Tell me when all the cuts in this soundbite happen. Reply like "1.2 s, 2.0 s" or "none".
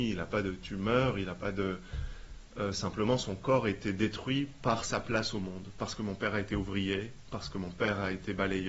none